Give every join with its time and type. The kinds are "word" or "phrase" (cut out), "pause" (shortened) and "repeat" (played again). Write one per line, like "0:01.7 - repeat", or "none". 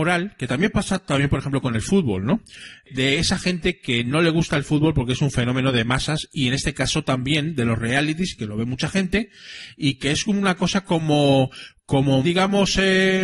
0:12.2 - word